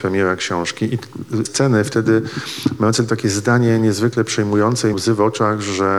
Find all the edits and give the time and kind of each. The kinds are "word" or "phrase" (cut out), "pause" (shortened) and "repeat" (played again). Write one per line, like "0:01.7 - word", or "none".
0:01.5 - word
0:03.1 - word
0:04.9 - word

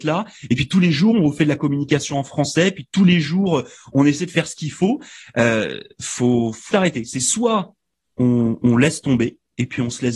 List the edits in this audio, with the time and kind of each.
0:06.7 - word

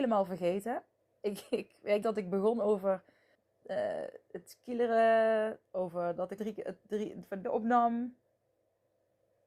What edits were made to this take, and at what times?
0:01.0 - pause
0:02.0 - word
0:03.3 - pause
0:06.4 - word
0:07.4 - word

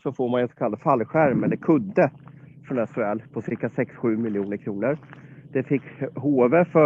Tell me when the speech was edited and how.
none

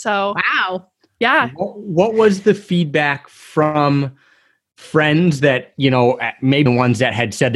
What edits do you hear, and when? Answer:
0:06.7 - word

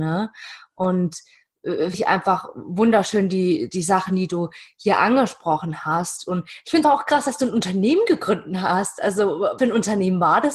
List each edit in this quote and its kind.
0:01.9 - word
0:06.8 - word
0:09.6 - word

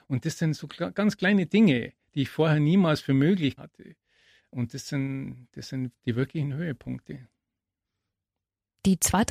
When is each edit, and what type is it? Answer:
0:03.6 - word

